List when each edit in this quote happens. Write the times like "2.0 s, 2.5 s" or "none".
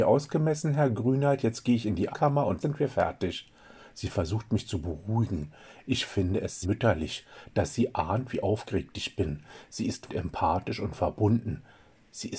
2.1 s, 2.6 s, 6.6 s, 10.1 s